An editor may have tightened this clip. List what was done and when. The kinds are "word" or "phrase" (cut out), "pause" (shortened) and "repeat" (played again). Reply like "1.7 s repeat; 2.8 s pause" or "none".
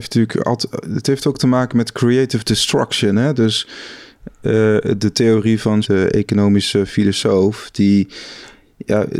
5.8 s phrase